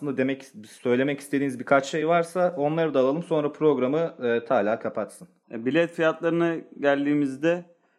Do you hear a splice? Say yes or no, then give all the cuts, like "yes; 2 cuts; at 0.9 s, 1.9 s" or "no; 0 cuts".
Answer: no; 0 cuts